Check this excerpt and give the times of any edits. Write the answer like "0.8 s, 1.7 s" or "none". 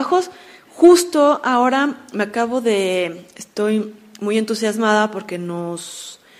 none